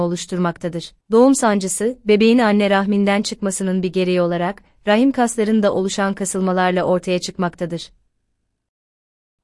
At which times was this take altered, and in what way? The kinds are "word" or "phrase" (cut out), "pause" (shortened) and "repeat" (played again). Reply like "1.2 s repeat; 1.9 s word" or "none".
1.0 s pause